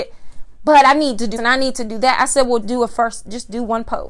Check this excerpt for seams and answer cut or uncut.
cut